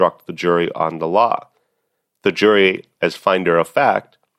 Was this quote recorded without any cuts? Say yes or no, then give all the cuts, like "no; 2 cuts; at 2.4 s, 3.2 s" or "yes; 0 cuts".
yes; 0 cuts